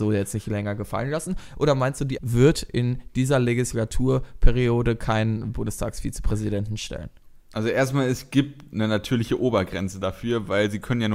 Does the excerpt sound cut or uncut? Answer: cut